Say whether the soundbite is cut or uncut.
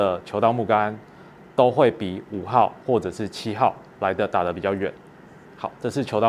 uncut